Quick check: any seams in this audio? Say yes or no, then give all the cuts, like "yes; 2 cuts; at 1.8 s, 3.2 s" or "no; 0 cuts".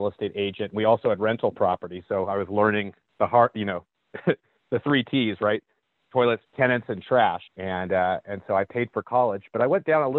yes; 2 cuts; at 6.5 s, 7.5 s